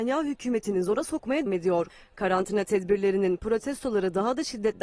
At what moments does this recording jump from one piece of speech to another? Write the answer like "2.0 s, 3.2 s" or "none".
1.5 s